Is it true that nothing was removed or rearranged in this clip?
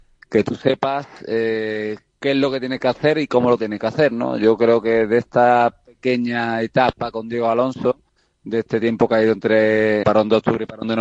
no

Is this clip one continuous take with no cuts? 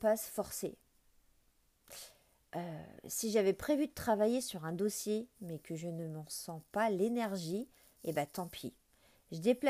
yes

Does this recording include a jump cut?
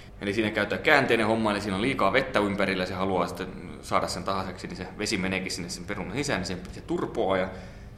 no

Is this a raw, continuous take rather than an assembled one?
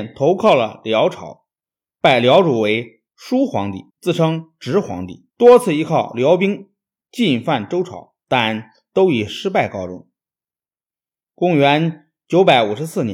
no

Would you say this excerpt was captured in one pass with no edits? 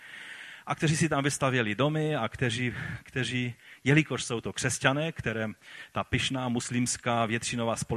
yes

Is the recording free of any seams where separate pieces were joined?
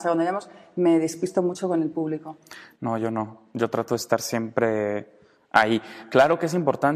yes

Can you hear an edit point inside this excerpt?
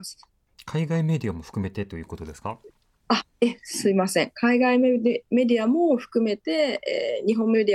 no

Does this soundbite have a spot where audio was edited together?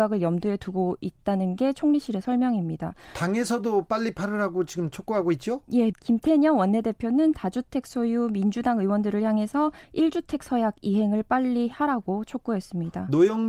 yes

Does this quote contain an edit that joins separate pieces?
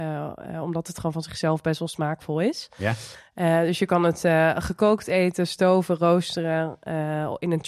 no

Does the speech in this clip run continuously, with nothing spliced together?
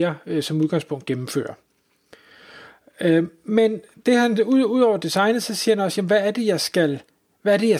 yes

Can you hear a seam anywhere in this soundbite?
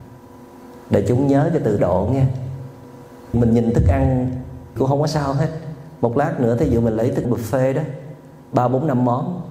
yes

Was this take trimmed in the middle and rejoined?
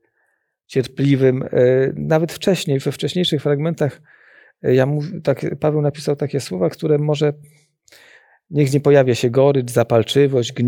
no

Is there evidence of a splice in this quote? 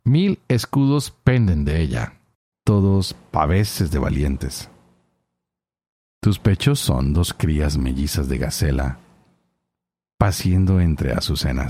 yes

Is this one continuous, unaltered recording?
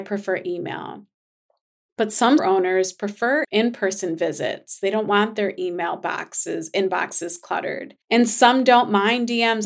no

